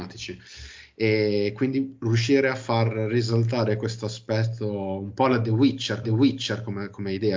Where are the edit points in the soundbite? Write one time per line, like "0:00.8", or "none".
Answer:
0:06.0

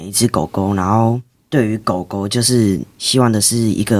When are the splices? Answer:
0:01.3
0:02.9

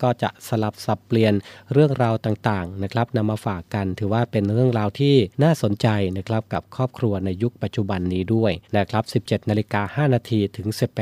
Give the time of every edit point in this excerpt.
0:05.3
0:08.7

